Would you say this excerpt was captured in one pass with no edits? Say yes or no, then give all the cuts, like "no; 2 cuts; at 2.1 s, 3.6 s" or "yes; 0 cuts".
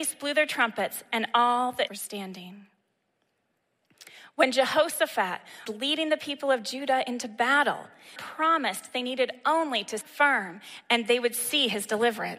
no; 4 cuts; at 1.9 s, 5.7 s, 8.2 s, 10.0 s